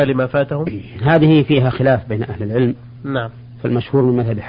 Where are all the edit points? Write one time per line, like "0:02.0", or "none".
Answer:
none